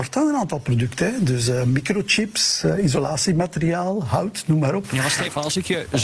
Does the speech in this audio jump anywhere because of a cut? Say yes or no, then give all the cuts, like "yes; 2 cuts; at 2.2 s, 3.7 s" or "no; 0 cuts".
no; 0 cuts